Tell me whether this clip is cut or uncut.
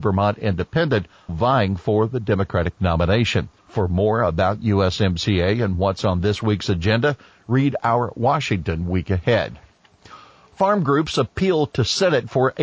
cut